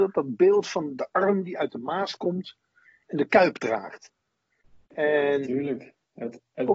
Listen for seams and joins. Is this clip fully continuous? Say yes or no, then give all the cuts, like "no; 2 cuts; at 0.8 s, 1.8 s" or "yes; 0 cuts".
yes; 0 cuts